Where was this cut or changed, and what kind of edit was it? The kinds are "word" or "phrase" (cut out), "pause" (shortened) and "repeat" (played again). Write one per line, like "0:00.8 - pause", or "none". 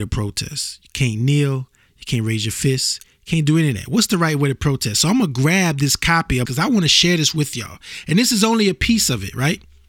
0:06.5 - phrase

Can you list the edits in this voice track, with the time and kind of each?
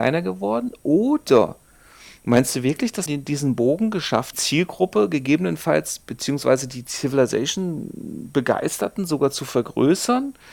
0:03.1 - word
0:04.3 - phrase

